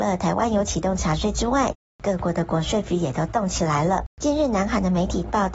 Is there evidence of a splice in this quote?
yes; 1 cut; at 4.1 s

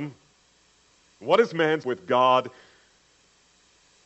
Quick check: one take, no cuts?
no; 1 cut; at 1.8 s

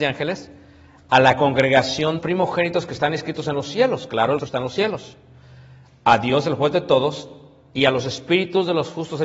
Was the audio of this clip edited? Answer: yes; 2 cuts; at 2.2 s, 4.4 s

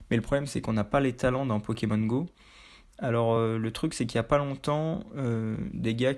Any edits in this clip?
no; 0 cuts

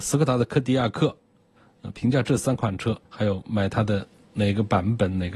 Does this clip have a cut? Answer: yes; 1 cut; at 3.0 s

